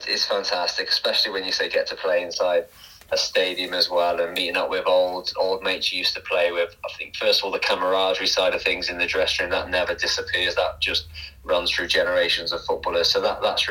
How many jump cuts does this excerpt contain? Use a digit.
0